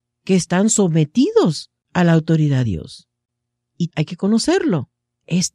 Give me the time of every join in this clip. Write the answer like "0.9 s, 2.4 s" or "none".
2.6 s, 3.9 s